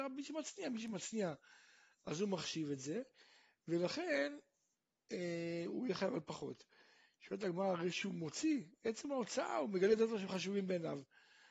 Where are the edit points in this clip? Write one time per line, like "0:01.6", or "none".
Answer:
none